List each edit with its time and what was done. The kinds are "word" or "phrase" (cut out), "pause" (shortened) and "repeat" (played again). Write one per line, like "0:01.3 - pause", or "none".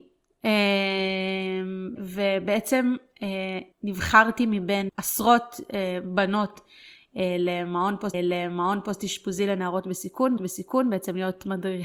0:02.0 - word
0:03.7 - pause
0:04.9 - word
0:08.1 - repeat
0:10.4 - repeat